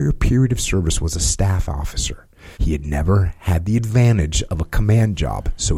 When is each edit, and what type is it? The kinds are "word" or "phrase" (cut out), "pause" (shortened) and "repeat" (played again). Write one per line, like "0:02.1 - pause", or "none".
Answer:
0:02.5 - pause